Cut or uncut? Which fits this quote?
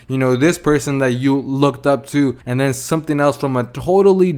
cut